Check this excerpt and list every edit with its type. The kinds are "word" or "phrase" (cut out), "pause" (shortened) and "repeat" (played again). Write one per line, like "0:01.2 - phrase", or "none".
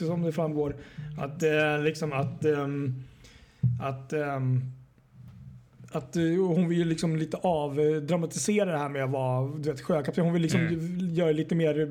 none